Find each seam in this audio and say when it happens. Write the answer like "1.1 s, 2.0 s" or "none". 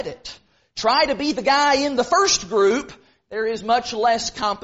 none